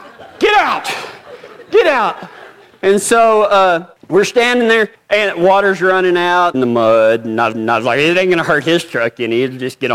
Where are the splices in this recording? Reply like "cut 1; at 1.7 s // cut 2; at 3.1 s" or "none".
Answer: cut 1; at 2.6 s // cut 2; at 4.0 s // cut 3; at 4.9 s // cut 4; at 6.5 s // cut 5; at 7.5 s